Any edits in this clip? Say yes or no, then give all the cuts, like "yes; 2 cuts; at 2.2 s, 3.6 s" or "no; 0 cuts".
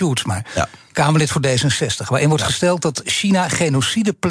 no; 0 cuts